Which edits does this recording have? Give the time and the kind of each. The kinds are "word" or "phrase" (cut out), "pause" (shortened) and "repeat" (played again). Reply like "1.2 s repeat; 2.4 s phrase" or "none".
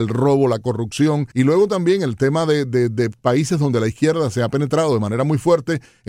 1.3 s pause